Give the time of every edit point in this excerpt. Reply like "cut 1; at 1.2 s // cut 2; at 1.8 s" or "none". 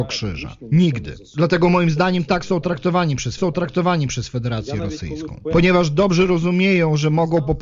cut 1; at 3.4 s